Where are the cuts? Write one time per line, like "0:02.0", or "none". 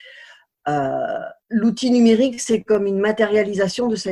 0:01.4